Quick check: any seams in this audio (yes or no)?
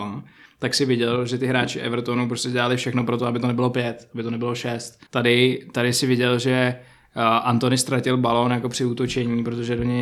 yes